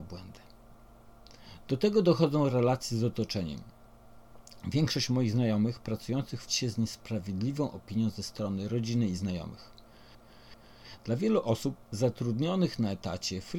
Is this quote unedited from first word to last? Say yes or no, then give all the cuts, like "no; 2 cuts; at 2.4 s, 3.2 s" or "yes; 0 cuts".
no; 1 cut; at 6.5 s